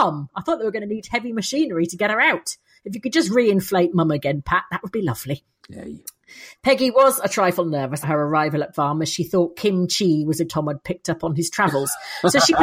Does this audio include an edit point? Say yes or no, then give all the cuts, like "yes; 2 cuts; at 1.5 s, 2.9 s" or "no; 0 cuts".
yes; 3 cuts; at 8.0 s, 8.7 s, 10.5 s